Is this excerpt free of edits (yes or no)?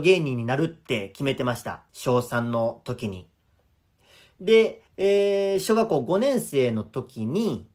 no